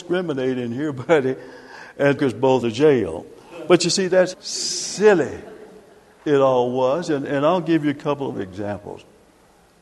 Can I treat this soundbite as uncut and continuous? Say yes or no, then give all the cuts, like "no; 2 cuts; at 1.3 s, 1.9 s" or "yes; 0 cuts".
no; 4 cuts; at 2.2 s, 2.6 s, 4.3 s, 8.3 s